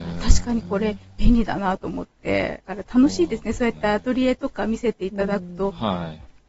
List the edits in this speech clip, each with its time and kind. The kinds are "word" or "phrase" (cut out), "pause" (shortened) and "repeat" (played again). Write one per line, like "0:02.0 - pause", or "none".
0:02.7 - pause